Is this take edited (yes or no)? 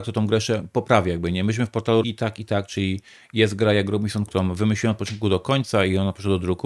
yes